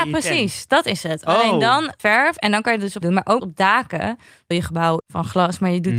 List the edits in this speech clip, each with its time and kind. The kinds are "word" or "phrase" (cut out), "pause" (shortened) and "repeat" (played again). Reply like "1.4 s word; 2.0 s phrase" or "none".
2.0 s word; 3.0 s word; 3.4 s word; 4.5 s word; 5.0 s word